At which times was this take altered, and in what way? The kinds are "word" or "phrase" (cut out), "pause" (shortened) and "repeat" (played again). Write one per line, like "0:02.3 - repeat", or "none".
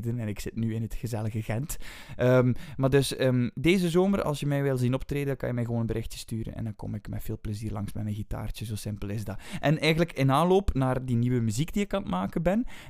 none